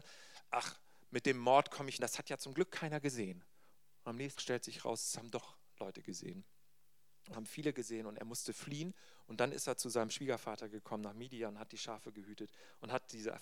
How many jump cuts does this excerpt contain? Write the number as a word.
three